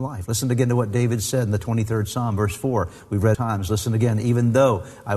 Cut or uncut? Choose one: cut